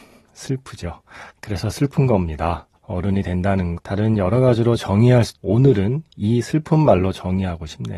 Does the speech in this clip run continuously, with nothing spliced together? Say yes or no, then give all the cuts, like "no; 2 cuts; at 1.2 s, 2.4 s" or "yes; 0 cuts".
no; 3 cuts; at 1.3 s, 3.8 s, 5.3 s